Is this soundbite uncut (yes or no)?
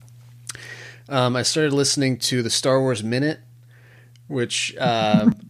yes